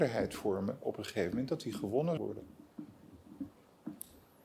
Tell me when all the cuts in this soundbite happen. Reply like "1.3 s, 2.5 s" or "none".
2.2 s